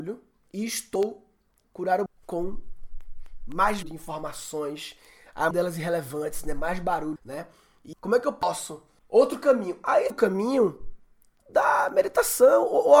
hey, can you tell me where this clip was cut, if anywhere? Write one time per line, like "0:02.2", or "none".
0:01.6
0:02.1
0:03.8
0:05.5
0:07.2
0:07.9
0:10.1